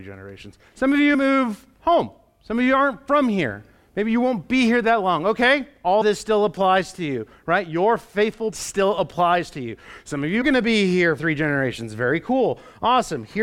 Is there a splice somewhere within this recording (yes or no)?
yes